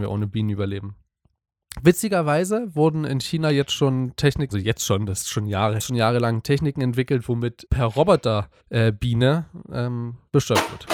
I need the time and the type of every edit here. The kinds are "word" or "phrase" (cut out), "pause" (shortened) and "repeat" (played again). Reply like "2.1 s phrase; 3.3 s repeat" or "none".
4.5 s word; 5.8 s phrase; 7.7 s word; 8.6 s pause